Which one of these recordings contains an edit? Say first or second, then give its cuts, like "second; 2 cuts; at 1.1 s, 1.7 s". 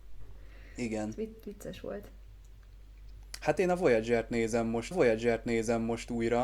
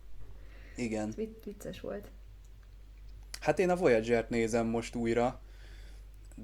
first; 1 cut; at 4.9 s